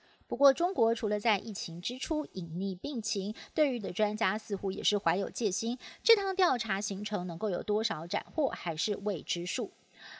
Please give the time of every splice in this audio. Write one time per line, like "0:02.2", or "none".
0:03.8